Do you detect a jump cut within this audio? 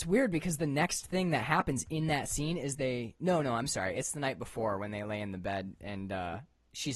no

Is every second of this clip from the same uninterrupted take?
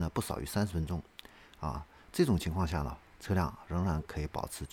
yes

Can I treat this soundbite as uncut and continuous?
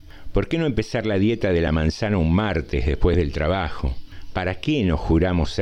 yes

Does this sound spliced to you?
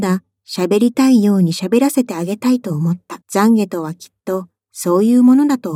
yes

